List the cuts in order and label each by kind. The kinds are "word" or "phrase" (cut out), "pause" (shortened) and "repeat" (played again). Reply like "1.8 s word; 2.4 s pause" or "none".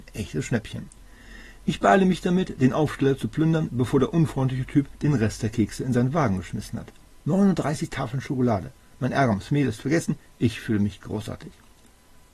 none